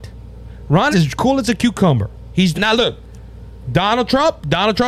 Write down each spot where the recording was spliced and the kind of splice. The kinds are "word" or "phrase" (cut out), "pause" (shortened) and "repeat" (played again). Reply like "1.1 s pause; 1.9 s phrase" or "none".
0.9 s word; 2.5 s phrase